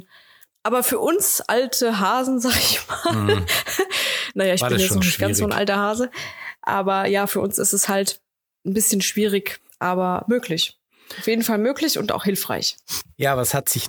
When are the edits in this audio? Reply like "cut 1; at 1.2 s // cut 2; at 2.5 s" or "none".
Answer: cut 1; at 8.5 s // cut 2; at 9.7 s